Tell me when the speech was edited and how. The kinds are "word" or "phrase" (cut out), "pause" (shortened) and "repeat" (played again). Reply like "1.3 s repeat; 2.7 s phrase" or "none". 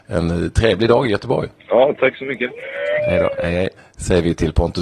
1.6 s pause; 3.8 s pause